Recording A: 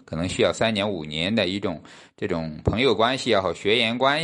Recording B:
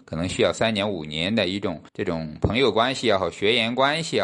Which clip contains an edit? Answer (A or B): B